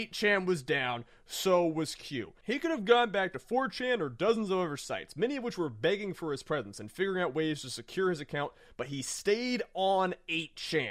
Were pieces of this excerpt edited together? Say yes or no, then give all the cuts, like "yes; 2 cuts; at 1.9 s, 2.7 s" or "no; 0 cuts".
no; 0 cuts